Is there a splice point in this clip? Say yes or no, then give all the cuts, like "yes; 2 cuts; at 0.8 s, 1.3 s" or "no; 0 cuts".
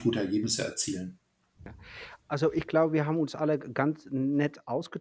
no; 0 cuts